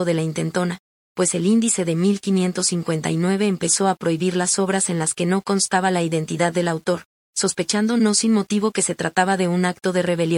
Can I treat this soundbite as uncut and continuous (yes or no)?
yes